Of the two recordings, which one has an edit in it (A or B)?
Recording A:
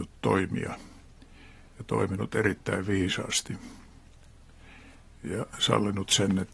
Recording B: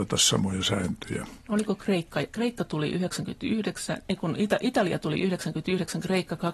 B